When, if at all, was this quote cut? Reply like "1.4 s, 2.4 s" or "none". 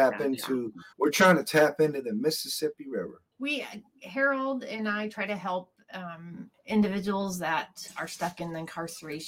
0.9 s, 3.3 s, 6.6 s